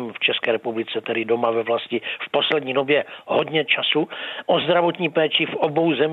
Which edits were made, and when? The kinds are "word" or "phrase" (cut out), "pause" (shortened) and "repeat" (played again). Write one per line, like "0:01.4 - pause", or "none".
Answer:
none